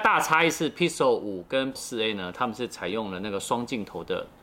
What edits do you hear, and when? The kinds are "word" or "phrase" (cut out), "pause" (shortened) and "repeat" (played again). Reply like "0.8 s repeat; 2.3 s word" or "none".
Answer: 1.7 s word